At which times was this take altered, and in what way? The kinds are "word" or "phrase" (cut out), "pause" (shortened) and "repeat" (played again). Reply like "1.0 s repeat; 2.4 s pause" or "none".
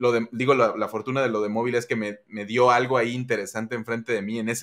none